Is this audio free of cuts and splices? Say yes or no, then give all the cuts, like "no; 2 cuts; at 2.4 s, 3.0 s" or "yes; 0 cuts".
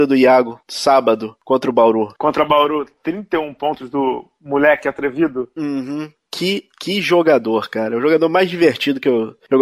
yes; 0 cuts